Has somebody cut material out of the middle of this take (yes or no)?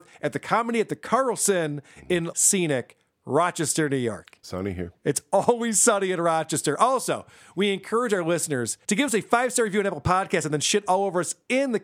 yes